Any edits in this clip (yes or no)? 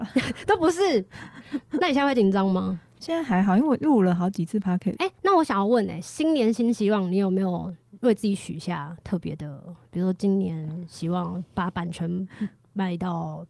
yes